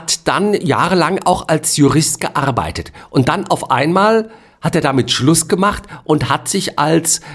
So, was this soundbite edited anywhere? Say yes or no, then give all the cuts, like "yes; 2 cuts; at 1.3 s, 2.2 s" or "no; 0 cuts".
no; 0 cuts